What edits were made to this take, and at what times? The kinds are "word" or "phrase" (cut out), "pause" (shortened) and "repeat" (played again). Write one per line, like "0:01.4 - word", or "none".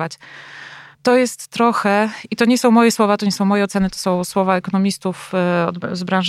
0:00.9 - pause